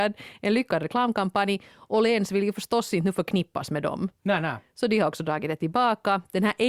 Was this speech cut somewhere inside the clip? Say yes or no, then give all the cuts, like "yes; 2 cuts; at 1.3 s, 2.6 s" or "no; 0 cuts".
no; 0 cuts